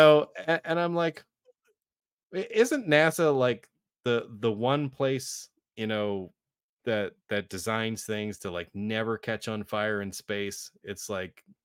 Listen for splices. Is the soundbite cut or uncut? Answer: uncut